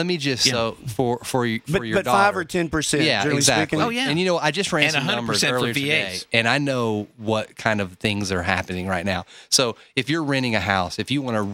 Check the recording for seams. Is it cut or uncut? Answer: uncut